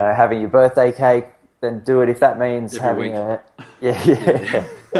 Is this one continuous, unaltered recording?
yes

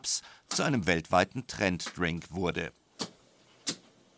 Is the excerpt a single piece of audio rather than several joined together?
yes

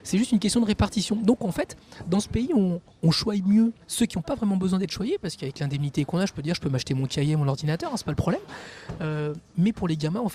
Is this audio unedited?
no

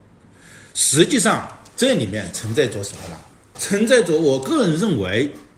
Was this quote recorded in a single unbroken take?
yes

